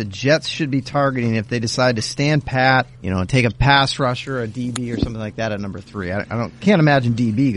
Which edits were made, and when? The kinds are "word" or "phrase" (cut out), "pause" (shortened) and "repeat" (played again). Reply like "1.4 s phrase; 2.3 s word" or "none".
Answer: 2.9 s pause